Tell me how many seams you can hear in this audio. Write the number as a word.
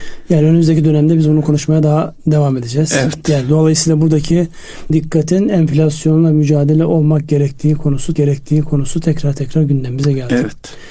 two